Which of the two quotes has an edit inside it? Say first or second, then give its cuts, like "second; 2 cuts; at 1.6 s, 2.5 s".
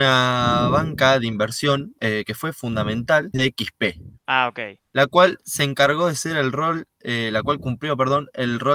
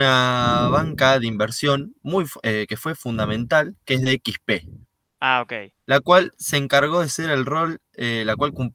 first; 3 cuts; at 2.0 s, 3.3 s, 4.2 s